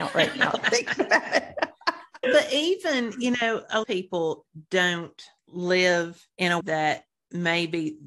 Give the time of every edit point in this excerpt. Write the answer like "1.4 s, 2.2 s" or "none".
2.2 s, 3.8 s, 6.6 s